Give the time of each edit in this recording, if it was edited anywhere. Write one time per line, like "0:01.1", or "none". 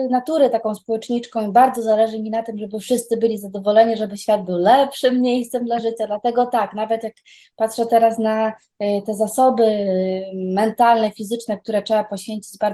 none